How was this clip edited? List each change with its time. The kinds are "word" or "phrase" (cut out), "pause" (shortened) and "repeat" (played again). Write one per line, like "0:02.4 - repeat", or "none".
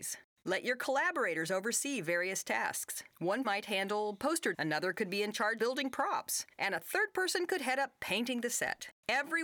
0:03.4 - word
0:04.5 - word
0:05.6 - word
0:06.5 - pause